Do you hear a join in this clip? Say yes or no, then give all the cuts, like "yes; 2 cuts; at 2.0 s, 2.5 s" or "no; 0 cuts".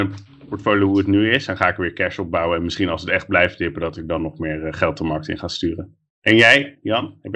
no; 0 cuts